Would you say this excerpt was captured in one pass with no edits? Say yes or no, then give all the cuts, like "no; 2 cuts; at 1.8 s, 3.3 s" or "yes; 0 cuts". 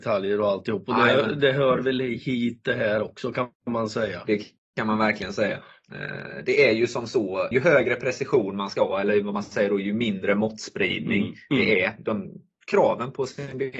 yes; 0 cuts